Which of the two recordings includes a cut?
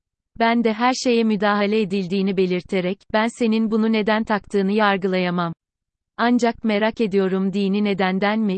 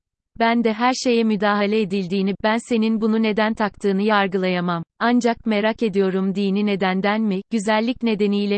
second; 2 cuts; at 2.3 s, 4.9 s

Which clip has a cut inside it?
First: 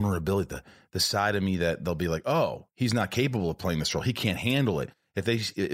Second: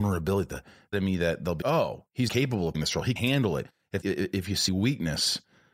second; 7 cuts; at 0.9 s, 1.6 s, 2.3 s, 2.7 s, 3.2 s, 4.0 s, 4.7 s

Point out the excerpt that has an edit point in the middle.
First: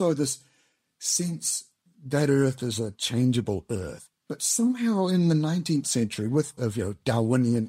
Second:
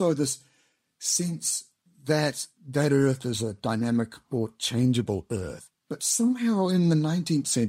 first; 3 cuts; at 1.9 s, 2.9 s, 6.6 s

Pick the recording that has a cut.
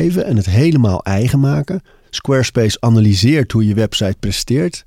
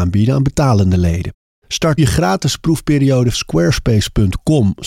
second; 2 cuts; at 2.0 s, 3.3 s

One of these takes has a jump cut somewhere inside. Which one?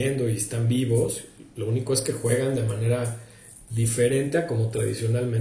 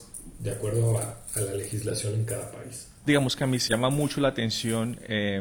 second; 1 cut; at 3.7 s

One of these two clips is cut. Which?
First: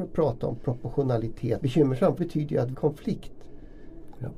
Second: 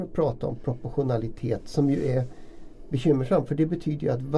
first; 3 cuts; at 1.6 s, 2.2 s, 2.7 s

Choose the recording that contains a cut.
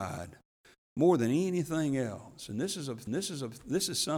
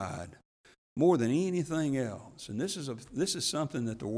first; 1 cut; at 3.1 s

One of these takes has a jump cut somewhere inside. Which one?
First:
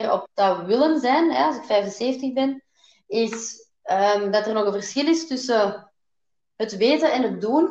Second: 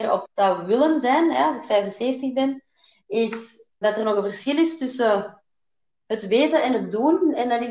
second; 1 cut; at 3.8 s

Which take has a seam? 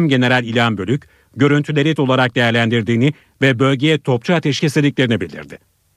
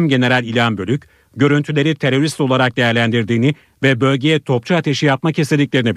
first; 2 cuts; at 2.0 s, 4.6 s

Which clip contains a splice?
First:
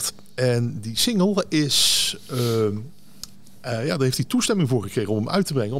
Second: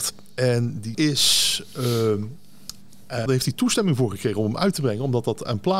second; 2 cuts; at 0.9 s, 3.3 s

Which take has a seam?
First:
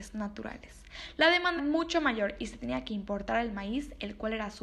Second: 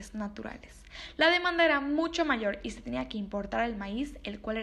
first; 1 cut; at 1.6 s

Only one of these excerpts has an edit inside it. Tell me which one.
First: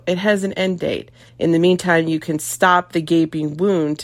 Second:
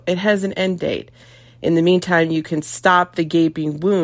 first; 1 cut; at 1.3 s

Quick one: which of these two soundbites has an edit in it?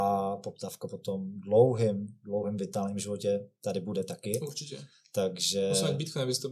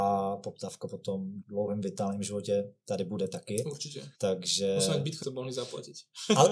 second; 3 cuts; at 1.4 s, 4.1 s, 5.2 s

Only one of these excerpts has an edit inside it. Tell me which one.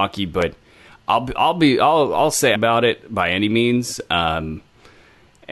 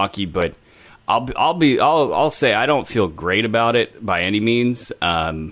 first; 1 cut; at 2.6 s

